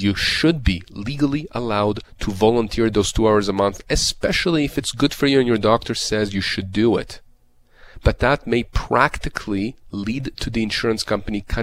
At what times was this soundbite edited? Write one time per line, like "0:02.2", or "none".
none